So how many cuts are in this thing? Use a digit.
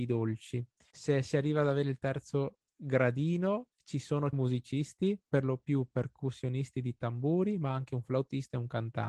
2